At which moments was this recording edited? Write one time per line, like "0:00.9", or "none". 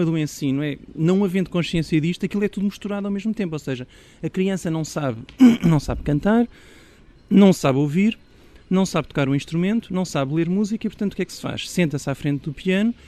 none